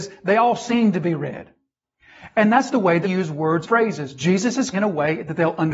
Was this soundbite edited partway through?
yes; 4 cuts; at 2.7 s, 3.0 s, 3.6 s, 4.7 s

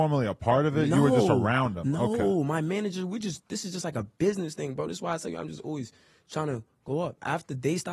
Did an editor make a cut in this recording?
no; 0 cuts

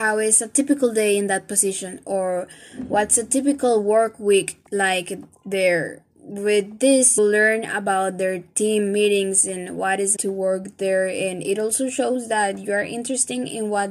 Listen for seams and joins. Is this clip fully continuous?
no; 3 cuts; at 4.7 s, 7.2 s, 10.2 s

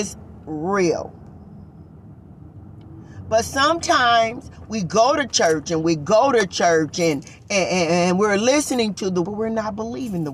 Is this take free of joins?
no; 1 cut; at 9.2 s

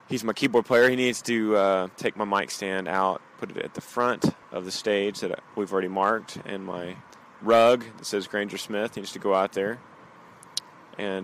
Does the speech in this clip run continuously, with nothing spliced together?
no; 4 cuts; at 1.9 s, 3.3 s, 4.4 s, 7.1 s

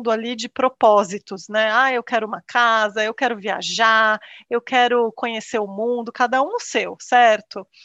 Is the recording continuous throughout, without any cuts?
yes; 0 cuts

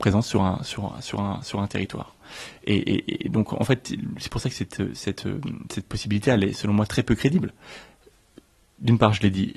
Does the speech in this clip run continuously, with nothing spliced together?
yes; 0 cuts

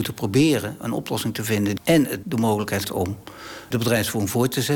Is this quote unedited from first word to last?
no; 4 cuts; at 1.8 s, 2.2 s, 2.8 s, 3.7 s

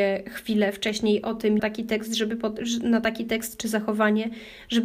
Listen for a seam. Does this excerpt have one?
yes; 1 cut; at 1.6 s

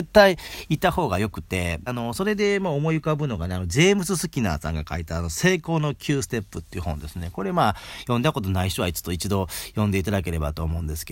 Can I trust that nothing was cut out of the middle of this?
no; 1 cut; at 1.9 s

